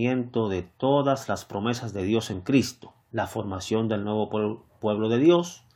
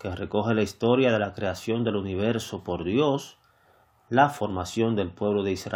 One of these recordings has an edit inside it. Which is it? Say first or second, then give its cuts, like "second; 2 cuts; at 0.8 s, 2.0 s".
first; 1 cut; at 3.0 s